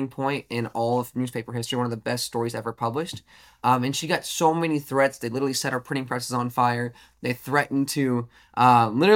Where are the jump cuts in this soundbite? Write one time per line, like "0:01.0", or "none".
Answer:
none